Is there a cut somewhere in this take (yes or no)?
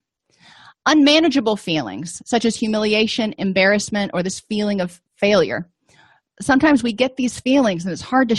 no